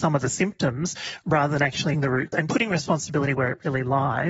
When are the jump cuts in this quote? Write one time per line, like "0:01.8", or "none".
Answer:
0:01.9
0:02.3